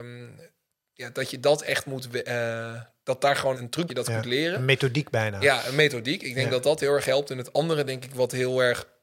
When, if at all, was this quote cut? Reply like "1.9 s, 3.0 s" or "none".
3.5 s, 3.9 s